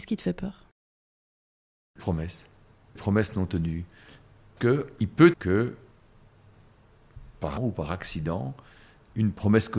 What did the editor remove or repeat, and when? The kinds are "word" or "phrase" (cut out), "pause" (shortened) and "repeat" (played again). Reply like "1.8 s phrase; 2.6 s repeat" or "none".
2.0 s word; 3.0 s word; 4.6 s word; 5.3 s word; 7.6 s word